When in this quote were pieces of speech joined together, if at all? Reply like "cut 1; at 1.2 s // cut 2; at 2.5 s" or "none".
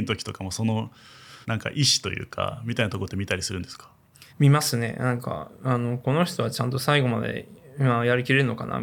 cut 1; at 1.4 s // cut 2; at 4.3 s